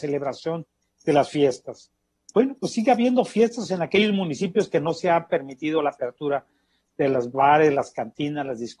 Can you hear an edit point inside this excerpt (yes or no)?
no